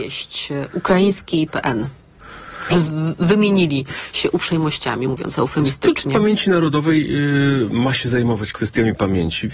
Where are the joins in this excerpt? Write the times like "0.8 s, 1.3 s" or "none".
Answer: 1.5 s, 2.7 s